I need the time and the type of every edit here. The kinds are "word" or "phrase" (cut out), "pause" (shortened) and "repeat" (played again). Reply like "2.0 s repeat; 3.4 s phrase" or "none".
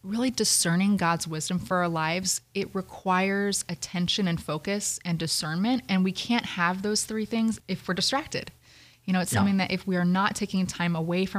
none